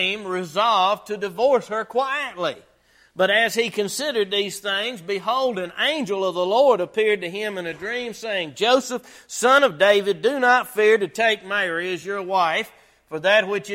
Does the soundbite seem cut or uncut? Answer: uncut